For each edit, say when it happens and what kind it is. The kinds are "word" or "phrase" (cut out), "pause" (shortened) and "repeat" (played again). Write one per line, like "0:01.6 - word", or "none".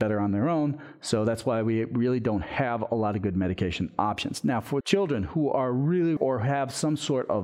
0:04.8 - word
0:06.2 - phrase